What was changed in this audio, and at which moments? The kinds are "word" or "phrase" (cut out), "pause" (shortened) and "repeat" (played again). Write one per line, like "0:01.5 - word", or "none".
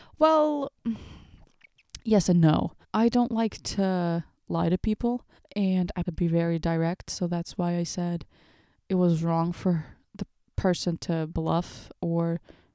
0:02.8 - pause
0:05.4 - pause
0:06.1 - phrase